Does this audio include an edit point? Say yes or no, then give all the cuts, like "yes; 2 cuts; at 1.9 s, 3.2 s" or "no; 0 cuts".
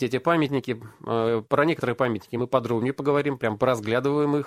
no; 0 cuts